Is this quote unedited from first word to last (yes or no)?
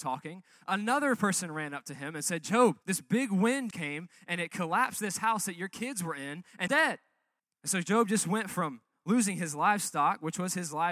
no